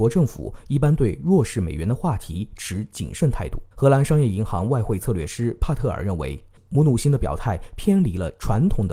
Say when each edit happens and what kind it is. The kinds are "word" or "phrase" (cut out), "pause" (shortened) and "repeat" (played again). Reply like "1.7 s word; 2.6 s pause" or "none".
3.7 s pause